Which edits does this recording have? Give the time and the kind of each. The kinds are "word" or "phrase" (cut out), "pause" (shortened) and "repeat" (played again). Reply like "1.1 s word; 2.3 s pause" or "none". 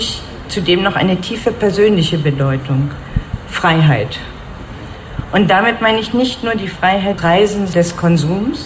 7.2 s word; 7.7 s word